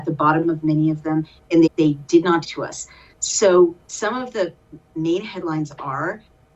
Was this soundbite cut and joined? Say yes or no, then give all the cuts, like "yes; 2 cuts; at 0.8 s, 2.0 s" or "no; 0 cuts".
yes; 3 cuts; at 1.7 s, 2.4 s, 3.8 s